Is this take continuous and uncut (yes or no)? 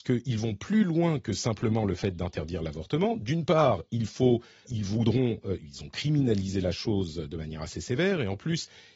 no